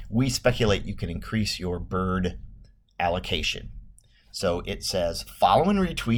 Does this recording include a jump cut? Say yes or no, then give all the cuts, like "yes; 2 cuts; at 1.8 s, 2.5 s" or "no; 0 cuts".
no; 0 cuts